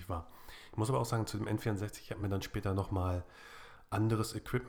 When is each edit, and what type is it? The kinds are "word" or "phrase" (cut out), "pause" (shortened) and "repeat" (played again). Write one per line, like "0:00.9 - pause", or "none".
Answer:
none